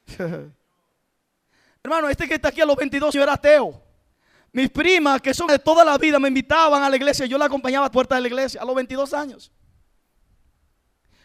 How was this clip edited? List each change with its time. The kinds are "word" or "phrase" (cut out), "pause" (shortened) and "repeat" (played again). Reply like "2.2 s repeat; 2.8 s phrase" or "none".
3.1 s word; 4.1 s pause; 5.5 s word; 7.9 s word